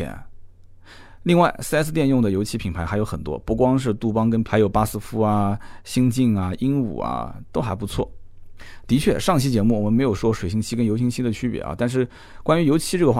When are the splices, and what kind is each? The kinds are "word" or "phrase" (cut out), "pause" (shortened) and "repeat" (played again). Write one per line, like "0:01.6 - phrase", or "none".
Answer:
0:04.4 - word